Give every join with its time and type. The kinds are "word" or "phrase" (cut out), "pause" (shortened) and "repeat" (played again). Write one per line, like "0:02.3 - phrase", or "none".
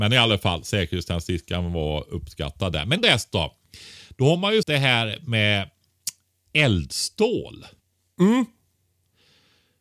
0:03.0 - word
0:04.6 - word